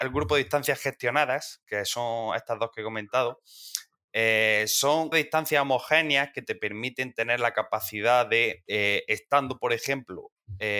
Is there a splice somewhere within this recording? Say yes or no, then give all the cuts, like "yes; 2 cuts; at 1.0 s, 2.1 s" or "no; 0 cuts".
yes; 1 cut; at 5.1 s